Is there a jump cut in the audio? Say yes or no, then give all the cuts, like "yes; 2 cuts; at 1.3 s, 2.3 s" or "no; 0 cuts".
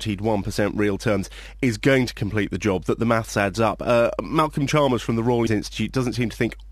yes; 1 cut; at 5.5 s